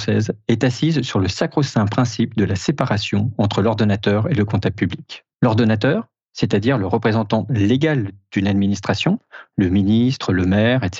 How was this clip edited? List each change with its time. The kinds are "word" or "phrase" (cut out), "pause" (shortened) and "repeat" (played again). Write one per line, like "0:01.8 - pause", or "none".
0:05.3 - pause